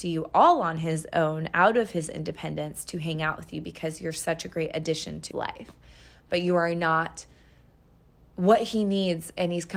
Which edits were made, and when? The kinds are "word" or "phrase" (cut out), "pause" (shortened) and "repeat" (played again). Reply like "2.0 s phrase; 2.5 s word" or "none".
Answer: 5.3 s word